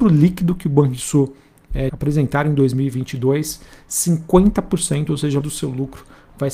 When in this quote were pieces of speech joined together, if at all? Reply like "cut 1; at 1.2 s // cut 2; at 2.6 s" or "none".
cut 1; at 1.9 s // cut 2; at 5.4 s

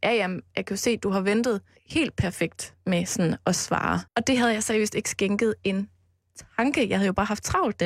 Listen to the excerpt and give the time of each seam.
cut 1; at 1.8 s // cut 2; at 4.1 s

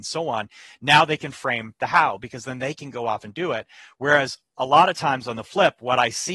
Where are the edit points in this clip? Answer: none

